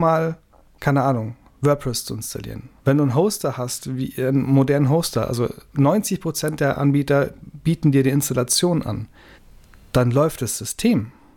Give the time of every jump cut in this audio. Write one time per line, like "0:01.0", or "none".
0:02.8
0:09.4